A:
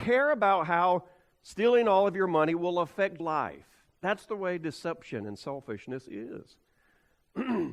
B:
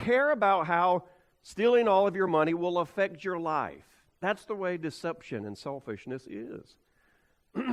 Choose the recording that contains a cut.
A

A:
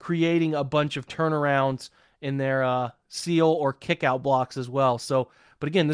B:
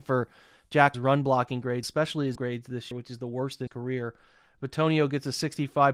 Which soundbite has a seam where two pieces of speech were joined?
B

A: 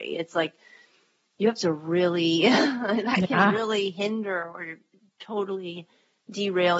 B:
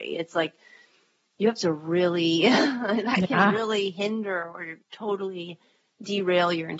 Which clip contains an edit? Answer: B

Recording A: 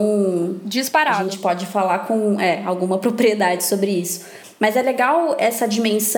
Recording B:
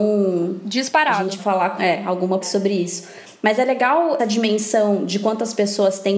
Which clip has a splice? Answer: B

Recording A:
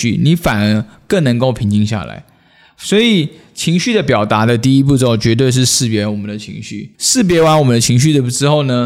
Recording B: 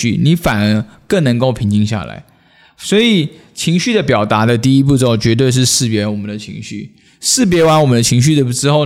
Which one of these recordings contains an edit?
A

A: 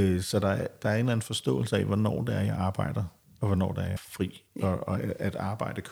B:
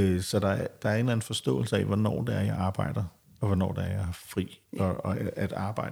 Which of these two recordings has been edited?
A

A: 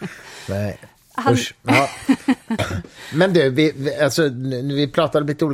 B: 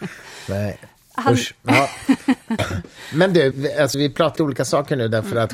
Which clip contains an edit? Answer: B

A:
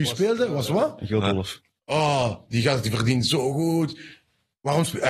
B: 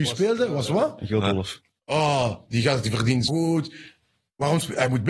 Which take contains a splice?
B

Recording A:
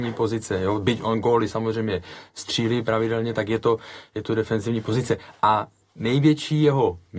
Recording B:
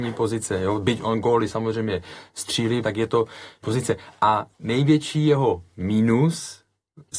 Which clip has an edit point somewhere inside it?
B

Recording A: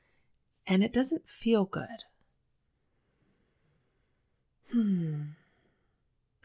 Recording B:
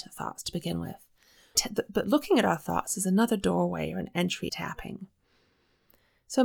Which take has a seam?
B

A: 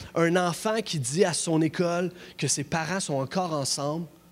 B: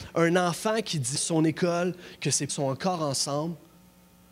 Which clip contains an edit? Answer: B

